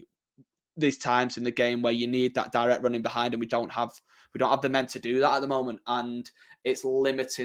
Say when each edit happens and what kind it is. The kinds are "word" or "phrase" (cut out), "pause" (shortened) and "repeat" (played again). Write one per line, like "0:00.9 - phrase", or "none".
0:03.5 - word